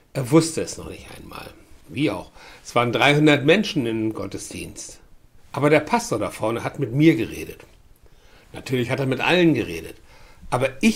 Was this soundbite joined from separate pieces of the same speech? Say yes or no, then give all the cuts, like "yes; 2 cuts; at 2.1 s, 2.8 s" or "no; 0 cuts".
yes; 2 cuts; at 1.8 s, 5.4 s